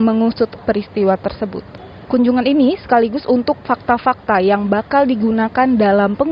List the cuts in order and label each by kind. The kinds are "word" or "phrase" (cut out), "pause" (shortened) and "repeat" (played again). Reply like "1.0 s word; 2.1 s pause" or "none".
3.6 s word